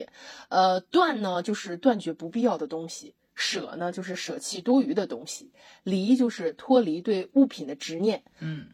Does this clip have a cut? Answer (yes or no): no